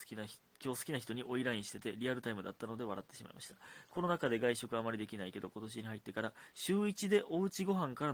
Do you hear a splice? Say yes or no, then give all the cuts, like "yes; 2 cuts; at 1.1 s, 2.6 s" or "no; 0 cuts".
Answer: no; 0 cuts